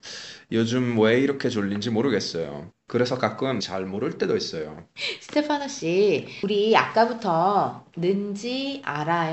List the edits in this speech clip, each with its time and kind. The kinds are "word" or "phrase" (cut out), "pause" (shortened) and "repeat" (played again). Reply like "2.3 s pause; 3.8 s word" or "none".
3.6 s phrase